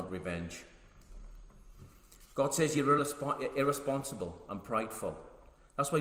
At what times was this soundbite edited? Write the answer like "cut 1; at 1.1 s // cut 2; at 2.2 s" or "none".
none